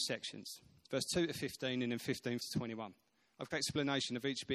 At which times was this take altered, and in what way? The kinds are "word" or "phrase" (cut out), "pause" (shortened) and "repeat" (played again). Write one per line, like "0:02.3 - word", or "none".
0:02.4 - word
0:03.5 - phrase